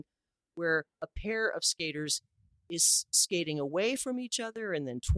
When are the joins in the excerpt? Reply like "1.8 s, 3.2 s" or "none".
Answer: none